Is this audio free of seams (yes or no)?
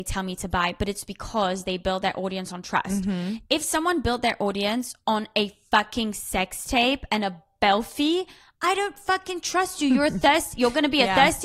yes